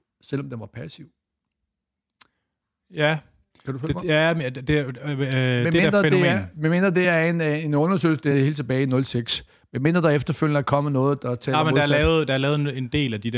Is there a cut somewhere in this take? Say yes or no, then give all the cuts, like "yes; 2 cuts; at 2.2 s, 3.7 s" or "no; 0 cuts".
no; 0 cuts